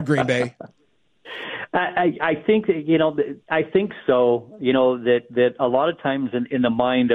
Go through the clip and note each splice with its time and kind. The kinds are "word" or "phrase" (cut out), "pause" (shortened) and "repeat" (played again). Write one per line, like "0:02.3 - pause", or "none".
0:03.4 - pause